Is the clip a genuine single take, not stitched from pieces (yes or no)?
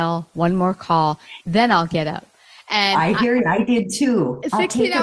yes